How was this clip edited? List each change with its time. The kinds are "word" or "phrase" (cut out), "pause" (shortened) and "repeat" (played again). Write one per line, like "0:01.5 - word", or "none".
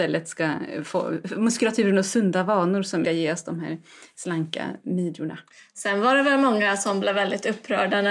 0:03.0 - phrase